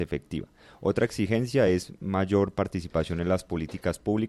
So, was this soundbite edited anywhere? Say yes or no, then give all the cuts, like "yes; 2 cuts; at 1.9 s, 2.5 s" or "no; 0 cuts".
no; 0 cuts